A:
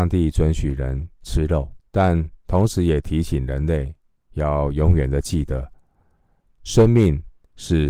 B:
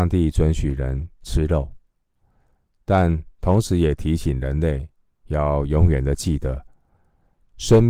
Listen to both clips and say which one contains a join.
A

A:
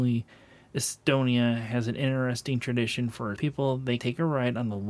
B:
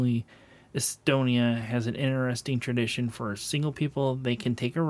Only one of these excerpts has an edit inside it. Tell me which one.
A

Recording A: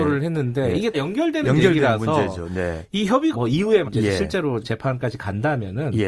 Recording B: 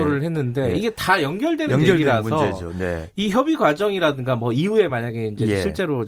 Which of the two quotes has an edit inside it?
A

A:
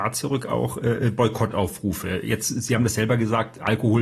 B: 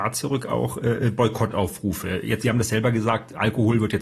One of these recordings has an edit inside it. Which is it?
B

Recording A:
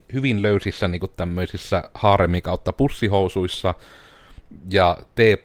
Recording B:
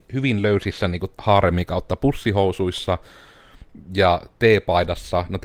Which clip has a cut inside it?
B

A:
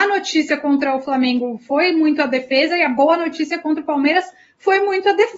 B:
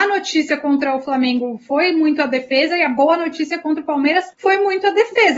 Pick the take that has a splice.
B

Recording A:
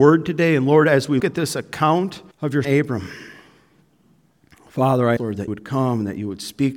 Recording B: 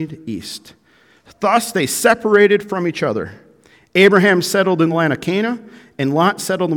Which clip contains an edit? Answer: A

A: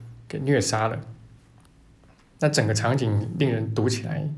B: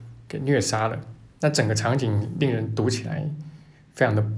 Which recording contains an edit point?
B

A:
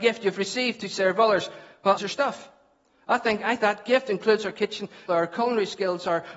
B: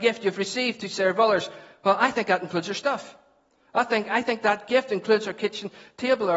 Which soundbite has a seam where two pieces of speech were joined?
A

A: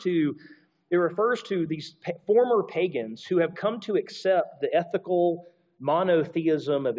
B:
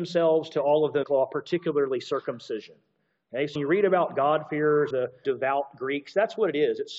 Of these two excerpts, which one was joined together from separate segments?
B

